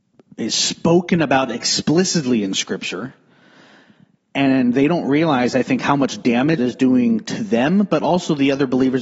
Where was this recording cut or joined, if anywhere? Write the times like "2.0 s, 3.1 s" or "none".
6.6 s